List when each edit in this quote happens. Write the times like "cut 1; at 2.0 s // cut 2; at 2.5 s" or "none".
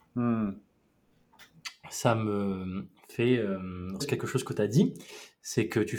cut 1; at 4.0 s